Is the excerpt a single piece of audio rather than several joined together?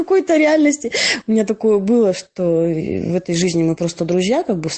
yes; 0 cuts

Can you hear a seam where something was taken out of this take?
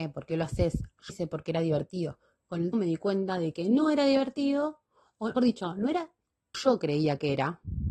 yes; 4 cuts; at 1.1 s, 2.7 s, 5.4 s, 6.5 s

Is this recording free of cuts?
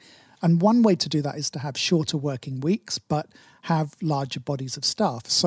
yes; 0 cuts

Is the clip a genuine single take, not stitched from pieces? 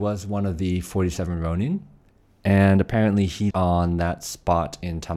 no; 1 cut; at 3.5 s

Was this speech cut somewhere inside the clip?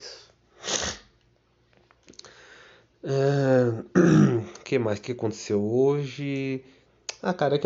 no; 0 cuts

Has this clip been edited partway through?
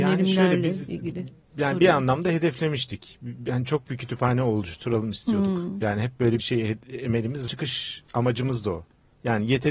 yes; 3 cuts; at 3.9 s, 6.4 s, 7.5 s

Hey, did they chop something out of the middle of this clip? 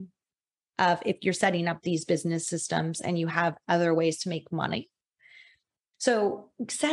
no; 0 cuts

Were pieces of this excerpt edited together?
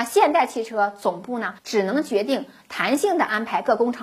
yes; 1 cut; at 1.6 s

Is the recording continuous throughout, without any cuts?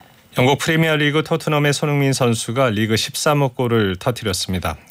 yes; 0 cuts

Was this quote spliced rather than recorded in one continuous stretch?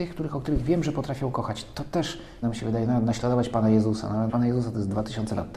yes; 2 cuts; at 2.4 s, 4.3 s

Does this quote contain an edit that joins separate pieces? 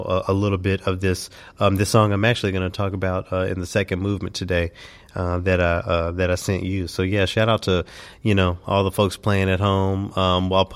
no; 0 cuts

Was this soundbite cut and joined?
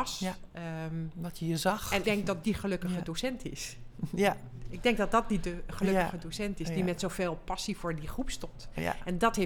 yes; 2 cuts; at 2.0 s, 2.4 s

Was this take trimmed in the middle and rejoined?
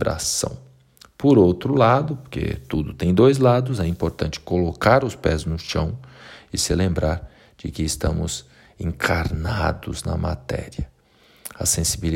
no; 0 cuts

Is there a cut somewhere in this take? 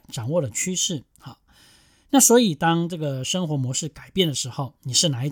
no; 0 cuts

